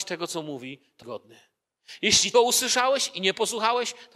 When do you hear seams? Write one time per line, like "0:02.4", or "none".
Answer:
0:01.0
0:02.3